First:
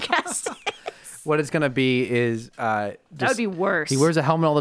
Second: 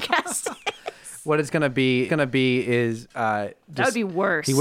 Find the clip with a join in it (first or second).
second